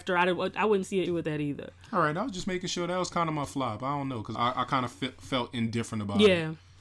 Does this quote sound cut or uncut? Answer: cut